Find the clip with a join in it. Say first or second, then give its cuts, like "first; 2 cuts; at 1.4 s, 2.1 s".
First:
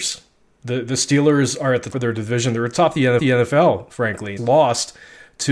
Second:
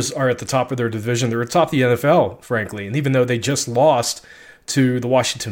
first; 3 cuts; at 1.9 s, 3.2 s, 4.4 s